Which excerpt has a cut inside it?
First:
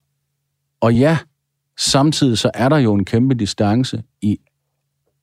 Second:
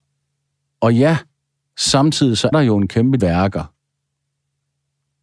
second; 2 cuts; at 2.5 s, 3.2 s

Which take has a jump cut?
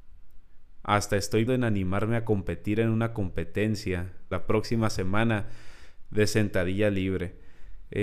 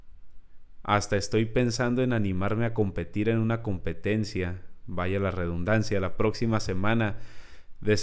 first; 2 cuts; at 1.5 s, 4.3 s

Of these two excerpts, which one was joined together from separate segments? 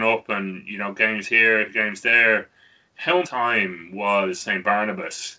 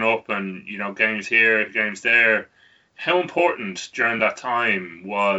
first; 1 cut; at 3.2 s

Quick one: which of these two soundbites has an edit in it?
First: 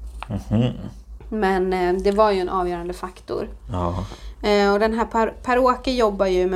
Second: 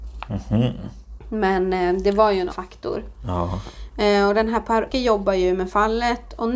second; 2 cuts; at 2.5 s, 4.9 s

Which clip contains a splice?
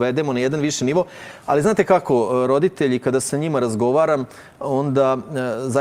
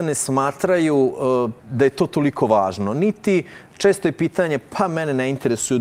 second; 1 cut; at 1.6 s

